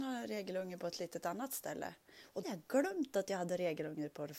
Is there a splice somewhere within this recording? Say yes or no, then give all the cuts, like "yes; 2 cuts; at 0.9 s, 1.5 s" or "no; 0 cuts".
yes; 1 cut; at 2.4 s